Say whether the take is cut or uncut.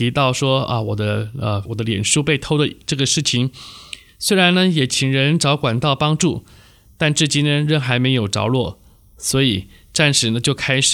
cut